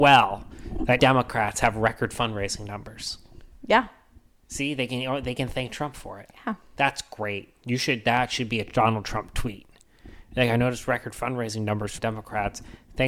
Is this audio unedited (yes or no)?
no